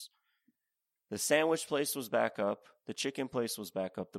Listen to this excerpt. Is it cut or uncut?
uncut